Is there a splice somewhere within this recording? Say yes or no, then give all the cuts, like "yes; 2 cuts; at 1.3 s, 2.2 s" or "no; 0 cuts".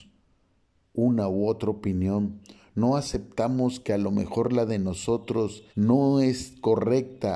yes; 1 cut; at 5.7 s